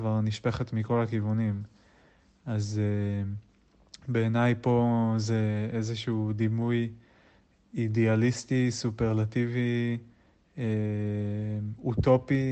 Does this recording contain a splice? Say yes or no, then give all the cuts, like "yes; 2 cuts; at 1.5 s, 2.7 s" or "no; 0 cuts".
no; 0 cuts